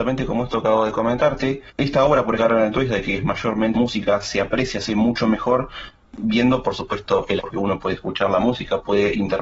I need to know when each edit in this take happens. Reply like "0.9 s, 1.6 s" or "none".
1.7 s, 2.4 s, 3.7 s, 4.9 s, 7.4 s